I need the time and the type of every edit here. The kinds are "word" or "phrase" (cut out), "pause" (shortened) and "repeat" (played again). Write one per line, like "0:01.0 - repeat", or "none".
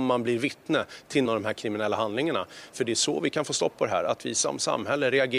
0:01.3 - word

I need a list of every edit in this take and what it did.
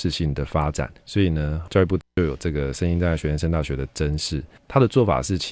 0:01.0 - pause

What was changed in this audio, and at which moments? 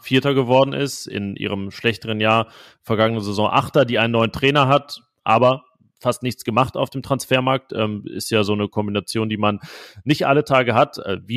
none

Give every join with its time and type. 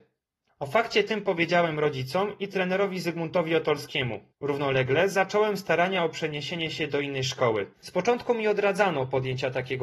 0:04.3 - pause
0:07.7 - pause

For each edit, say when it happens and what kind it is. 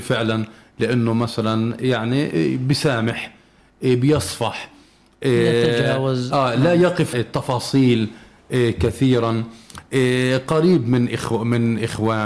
0:07.1 - word

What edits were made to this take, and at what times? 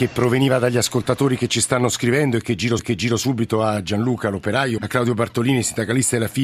0:02.8 - repeat
0:04.8 - phrase

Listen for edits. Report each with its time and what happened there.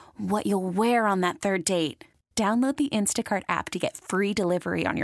none

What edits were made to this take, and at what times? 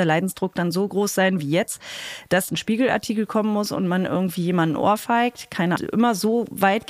0:02.5 - word
0:05.8 - phrase

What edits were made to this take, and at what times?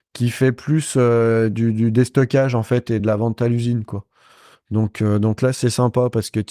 none

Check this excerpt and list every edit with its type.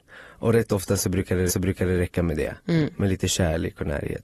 0:01.5 - repeat
0:02.6 - pause

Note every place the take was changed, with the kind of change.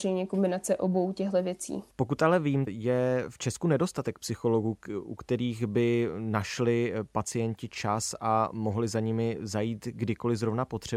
0:01.9 - pause
0:02.7 - phrase

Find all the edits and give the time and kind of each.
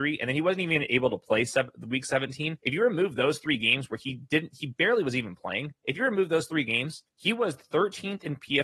0:02.6 - pause
0:07.1 - pause

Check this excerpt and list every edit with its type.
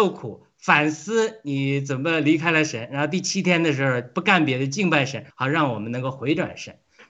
0:05.3 - pause

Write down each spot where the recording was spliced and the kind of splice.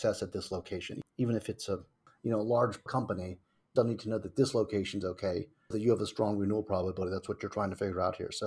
0:02.9 - word
0:03.8 - word
0:05.7 - word

